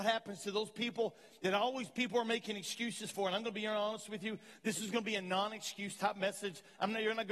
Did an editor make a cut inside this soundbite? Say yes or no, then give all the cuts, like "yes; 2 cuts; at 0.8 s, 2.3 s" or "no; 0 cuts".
no; 0 cuts